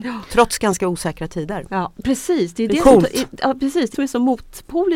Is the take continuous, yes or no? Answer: no